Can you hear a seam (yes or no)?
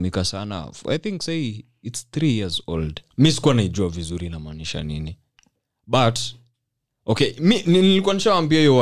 yes